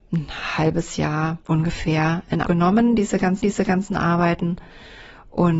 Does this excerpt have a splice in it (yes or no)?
yes